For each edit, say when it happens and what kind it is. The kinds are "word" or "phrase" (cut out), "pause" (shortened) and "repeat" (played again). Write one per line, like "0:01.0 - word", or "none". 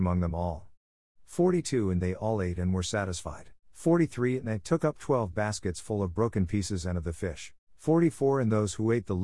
0:03.6 - pause
0:07.6 - pause